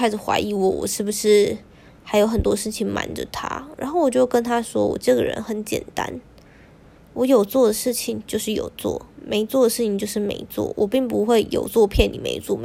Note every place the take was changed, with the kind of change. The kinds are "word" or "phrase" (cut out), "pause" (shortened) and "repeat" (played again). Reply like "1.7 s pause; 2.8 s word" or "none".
none

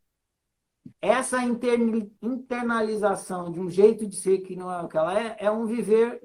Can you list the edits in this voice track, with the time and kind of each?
0.9 s pause

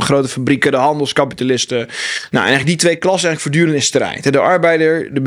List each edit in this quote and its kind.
none

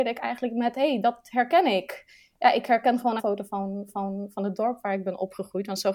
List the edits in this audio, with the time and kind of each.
3.2 s phrase; 3.9 s repeat

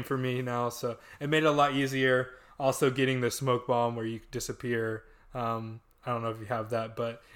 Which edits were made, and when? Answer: none

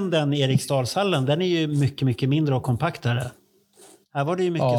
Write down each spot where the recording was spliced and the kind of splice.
none

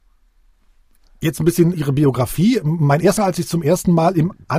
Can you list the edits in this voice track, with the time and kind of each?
1.7 s word; 3.2 s word

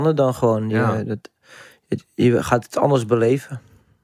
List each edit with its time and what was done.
none

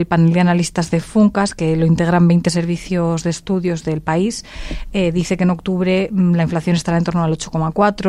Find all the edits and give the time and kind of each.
none

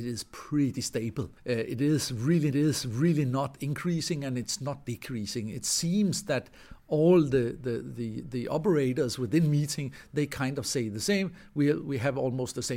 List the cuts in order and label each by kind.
1.4 s pause; 2.5 s repeat

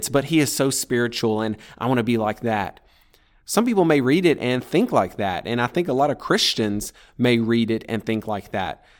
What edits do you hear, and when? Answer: none

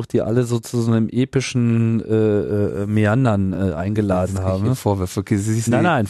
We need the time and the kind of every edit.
none

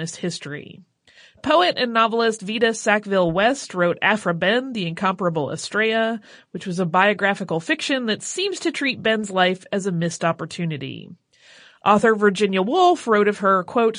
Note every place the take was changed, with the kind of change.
none

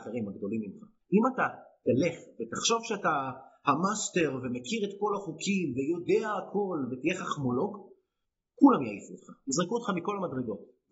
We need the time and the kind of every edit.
none

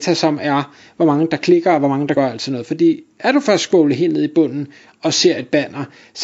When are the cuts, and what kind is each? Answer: 2.2 s word

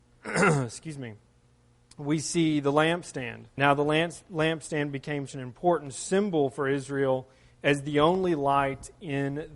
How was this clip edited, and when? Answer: 3.6 s word; 5.3 s word; 7.5 s word

